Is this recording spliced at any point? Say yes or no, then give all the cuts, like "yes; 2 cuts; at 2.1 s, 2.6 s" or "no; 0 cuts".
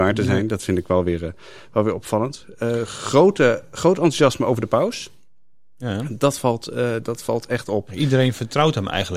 no; 0 cuts